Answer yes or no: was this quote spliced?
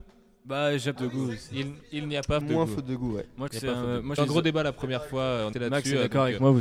yes